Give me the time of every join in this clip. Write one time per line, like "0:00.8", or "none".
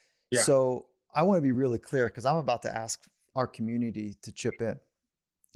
none